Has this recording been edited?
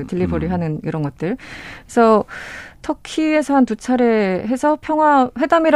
no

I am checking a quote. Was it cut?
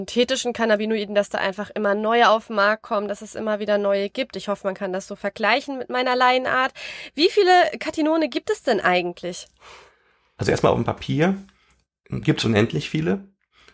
no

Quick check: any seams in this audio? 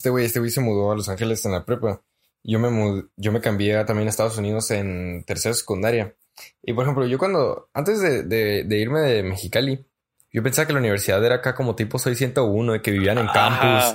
no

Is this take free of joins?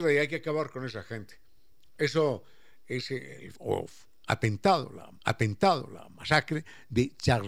no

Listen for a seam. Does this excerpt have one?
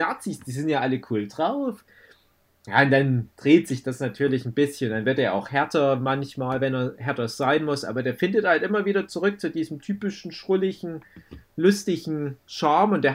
no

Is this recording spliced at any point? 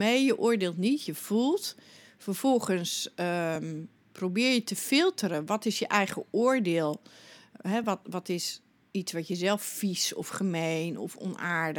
no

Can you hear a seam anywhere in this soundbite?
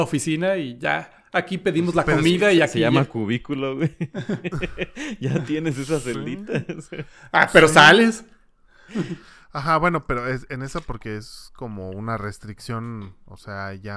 no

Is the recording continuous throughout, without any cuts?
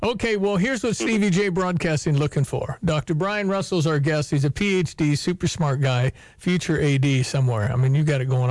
yes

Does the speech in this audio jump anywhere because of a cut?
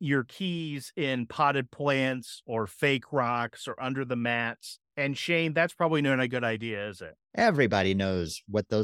yes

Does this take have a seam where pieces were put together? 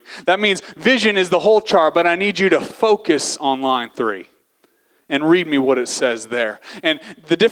no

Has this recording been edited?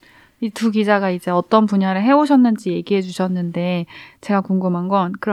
no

